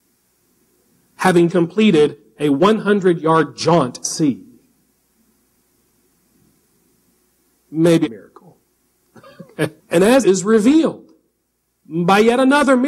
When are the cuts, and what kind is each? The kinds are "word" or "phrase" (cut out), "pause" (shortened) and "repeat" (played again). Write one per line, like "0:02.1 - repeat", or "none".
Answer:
0:01.5 - word
0:04.0 - word
0:08.1 - word
0:09.8 - pause
0:10.2 - phrase